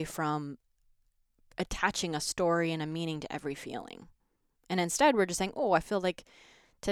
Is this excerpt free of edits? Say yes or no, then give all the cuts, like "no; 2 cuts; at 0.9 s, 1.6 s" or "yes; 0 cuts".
yes; 0 cuts